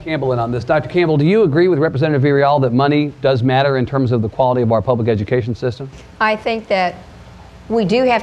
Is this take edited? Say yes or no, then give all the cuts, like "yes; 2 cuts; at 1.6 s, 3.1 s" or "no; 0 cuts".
no; 0 cuts